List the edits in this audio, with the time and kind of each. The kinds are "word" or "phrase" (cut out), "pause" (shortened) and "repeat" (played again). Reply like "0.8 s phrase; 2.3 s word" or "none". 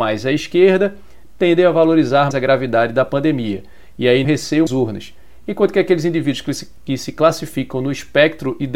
2.3 s word; 4.2 s phrase; 4.7 s phrase